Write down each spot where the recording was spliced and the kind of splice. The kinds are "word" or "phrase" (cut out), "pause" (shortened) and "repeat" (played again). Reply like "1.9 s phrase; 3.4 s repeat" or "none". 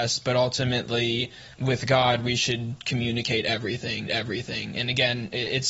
1.5 s pause; 4.1 s repeat